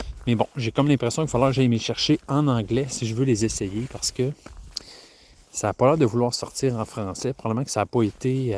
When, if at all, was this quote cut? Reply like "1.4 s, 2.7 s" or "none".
none

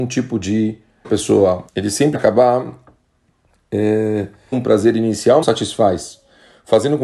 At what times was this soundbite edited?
1.0 s, 1.7 s, 2.1 s, 4.5 s, 5.4 s

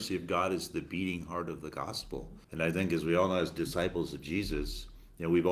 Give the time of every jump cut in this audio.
2.4 s

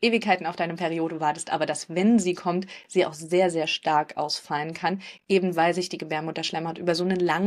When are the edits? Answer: none

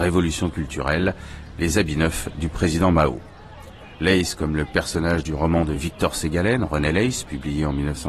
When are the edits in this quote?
none

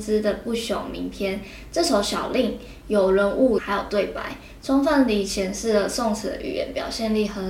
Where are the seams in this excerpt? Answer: 3.6 s

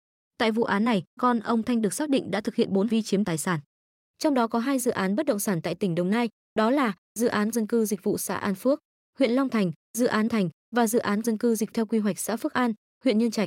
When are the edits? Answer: 1.2 s, 2.9 s, 3.2 s, 7.5 s, 10.3 s, 11.2 s, 11.7 s

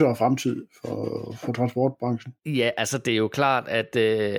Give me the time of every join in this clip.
2.4 s

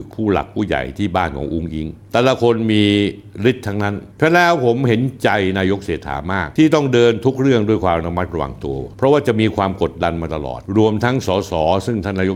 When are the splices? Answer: none

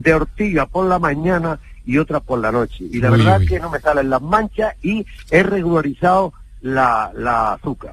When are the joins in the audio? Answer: none

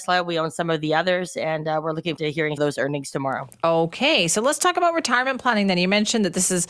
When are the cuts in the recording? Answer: 2.2 s, 2.6 s

